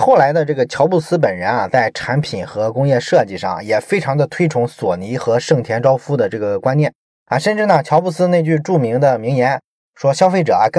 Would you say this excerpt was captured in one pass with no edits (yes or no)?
yes